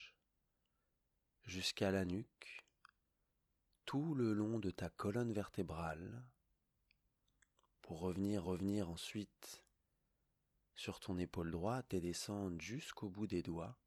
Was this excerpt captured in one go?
no; 1 cut; at 8.4 s

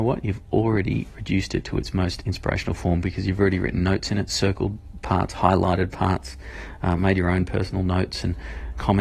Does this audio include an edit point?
no; 0 cuts

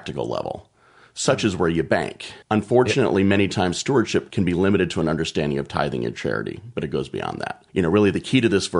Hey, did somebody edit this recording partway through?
yes; 2 cuts; at 2.4 s, 7.7 s

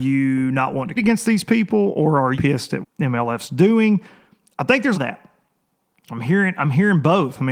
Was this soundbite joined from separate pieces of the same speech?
yes; 4 cuts; at 1.0 s, 2.3 s, 2.8 s, 4.9 s

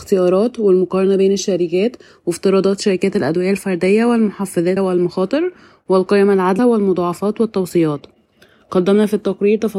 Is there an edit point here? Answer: yes; 2 cuts; at 4.8 s, 6.6 s

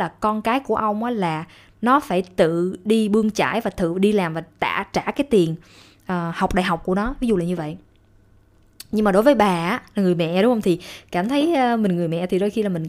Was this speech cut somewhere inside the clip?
no; 0 cuts

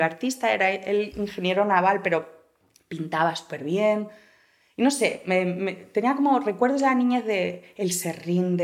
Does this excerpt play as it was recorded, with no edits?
yes; 0 cuts

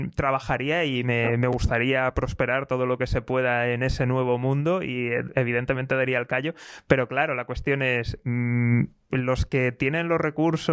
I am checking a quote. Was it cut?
no; 0 cuts

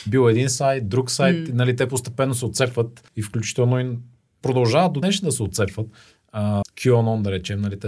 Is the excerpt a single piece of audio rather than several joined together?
no; 3 cuts; at 3.1 s, 5.0 s, 6.6 s

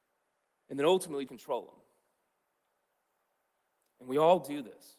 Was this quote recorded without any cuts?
no; 1 cut; at 1.3 s

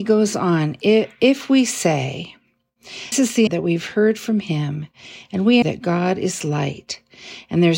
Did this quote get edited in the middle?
yes; 3 cuts; at 3.1 s, 3.5 s, 5.6 s

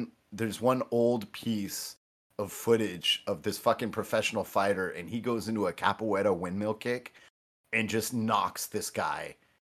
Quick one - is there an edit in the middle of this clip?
no; 0 cuts

